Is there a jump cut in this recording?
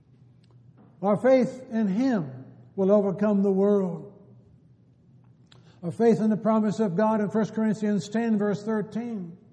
no; 0 cuts

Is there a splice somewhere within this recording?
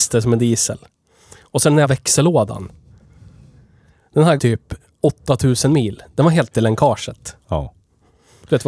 yes; 3 cuts; at 1.8 s, 4.4 s, 6.5 s

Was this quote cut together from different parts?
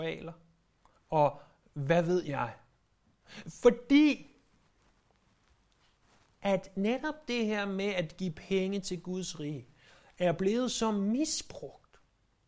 no; 0 cuts

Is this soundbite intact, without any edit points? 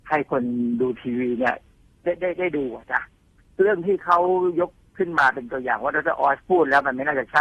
yes; 0 cuts

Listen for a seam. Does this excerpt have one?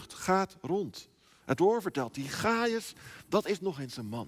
yes; 1 cut; at 1.6 s

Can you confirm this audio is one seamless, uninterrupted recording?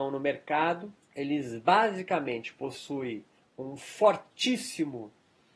no; 2 cuts; at 1.0 s, 3.4 s

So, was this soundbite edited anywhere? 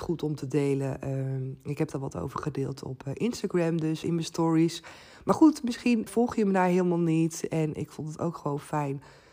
yes; 2 cuts; at 4.0 s, 6.1 s

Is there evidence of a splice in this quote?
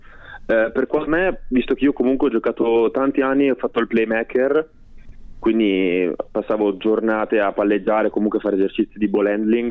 yes; 1 cut; at 1.1 s

